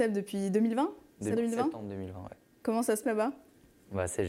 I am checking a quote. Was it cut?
yes; 2 cuts; at 1.4 s, 3.0 s

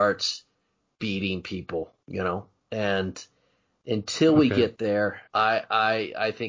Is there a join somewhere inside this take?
yes; 3 cuts; at 2.0 s, 2.6 s, 5.3 s

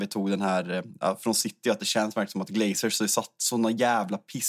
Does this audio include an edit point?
no; 0 cuts

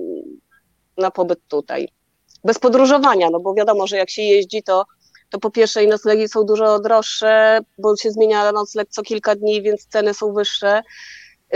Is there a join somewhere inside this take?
no; 0 cuts

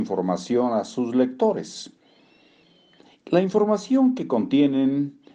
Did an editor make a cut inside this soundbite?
no; 0 cuts

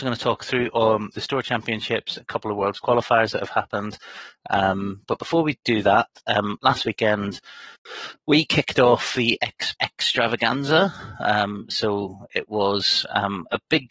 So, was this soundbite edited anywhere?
yes; 2 cuts; at 2.2 s, 9.7 s

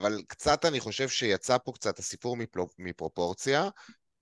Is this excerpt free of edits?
yes; 0 cuts

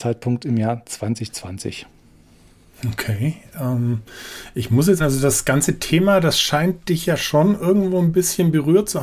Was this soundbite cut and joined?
yes; 1 cut; at 5.0 s

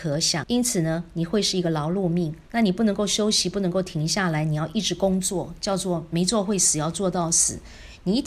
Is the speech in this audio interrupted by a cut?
yes; 1 cut; at 2.5 s

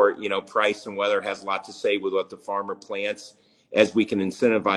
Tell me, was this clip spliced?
no; 0 cuts

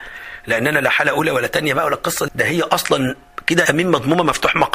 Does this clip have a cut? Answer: yes; 2 cuts; at 2.3 s, 3.7 s

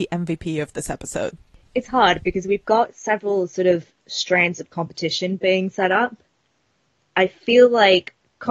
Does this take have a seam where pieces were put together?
no; 0 cuts

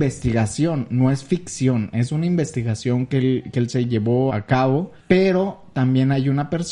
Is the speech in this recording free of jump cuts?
no; 2 cuts; at 4.3 s, 5.0 s

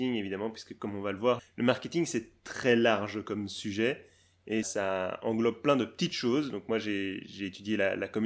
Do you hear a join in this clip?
yes; 2 cuts; at 1.4 s, 4.6 s

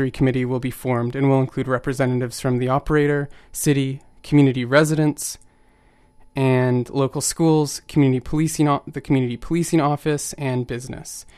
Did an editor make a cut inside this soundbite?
no; 0 cuts

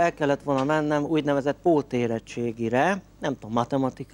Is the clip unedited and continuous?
no; 1 cut; at 3.1 s

